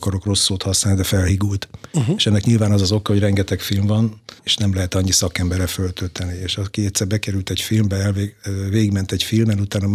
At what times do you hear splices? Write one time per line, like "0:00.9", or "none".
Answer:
0:04.4